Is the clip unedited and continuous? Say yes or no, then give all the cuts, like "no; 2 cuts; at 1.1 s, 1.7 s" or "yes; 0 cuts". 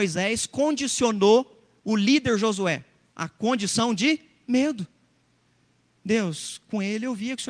yes; 0 cuts